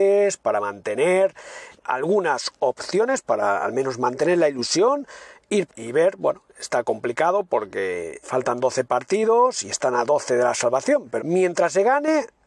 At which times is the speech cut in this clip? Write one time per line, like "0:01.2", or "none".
0:01.8
0:05.7
0:08.2
0:11.2